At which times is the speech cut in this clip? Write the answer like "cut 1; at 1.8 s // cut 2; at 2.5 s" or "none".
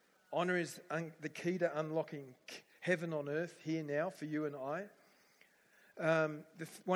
none